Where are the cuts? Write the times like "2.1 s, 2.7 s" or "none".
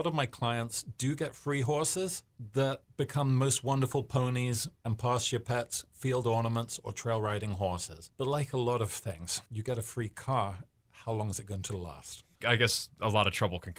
9.4 s